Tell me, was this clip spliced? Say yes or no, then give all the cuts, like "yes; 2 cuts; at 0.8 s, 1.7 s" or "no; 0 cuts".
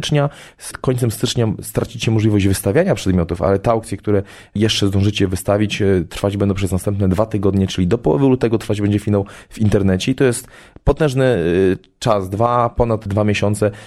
no; 0 cuts